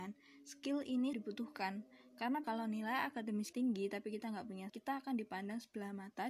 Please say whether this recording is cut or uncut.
cut